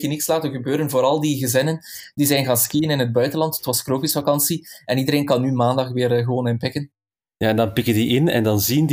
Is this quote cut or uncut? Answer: uncut